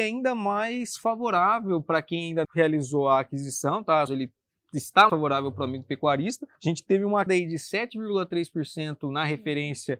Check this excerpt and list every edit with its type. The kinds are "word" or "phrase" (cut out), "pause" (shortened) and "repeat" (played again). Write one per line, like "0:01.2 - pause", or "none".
0:02.4 - word
0:04.1 - phrase
0:05.1 - word
0:06.5 - pause
0:07.3 - word